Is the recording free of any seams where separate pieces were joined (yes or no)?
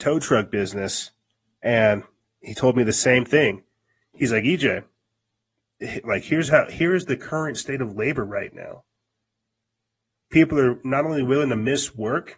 yes